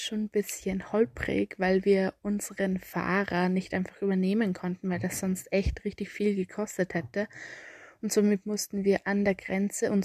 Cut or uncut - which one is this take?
uncut